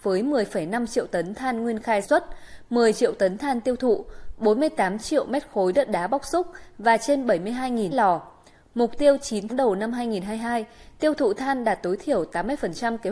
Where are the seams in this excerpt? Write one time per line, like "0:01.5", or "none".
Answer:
0:02.0
0:07.9
0:09.5